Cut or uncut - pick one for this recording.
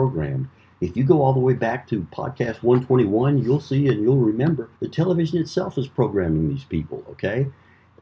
cut